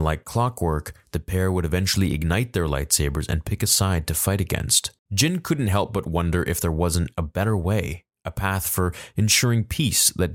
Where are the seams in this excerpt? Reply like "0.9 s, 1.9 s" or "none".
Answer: none